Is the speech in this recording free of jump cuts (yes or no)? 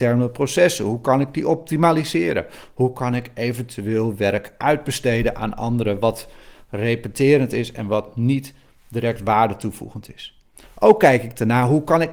yes